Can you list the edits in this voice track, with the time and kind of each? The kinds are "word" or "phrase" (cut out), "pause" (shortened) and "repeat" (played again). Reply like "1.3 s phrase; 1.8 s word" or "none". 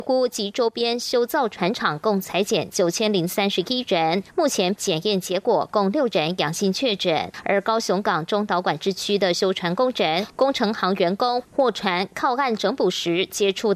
4.8 s word